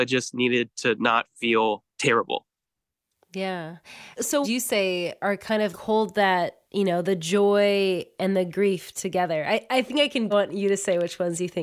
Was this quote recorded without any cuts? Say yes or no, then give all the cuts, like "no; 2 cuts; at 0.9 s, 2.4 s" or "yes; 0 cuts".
no; 5 cuts; at 1.9 s, 4.4 s, 5.7 s, 6.6 s, 10.3 s